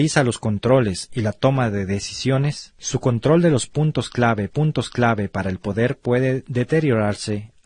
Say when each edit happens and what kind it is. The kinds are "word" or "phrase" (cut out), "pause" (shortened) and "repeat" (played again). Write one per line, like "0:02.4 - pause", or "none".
0:04.5 - repeat